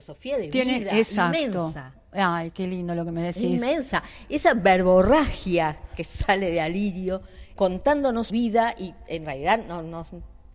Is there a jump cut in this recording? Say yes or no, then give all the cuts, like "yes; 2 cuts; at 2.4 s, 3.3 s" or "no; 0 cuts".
yes; 2 cuts; at 7.6 s, 8.3 s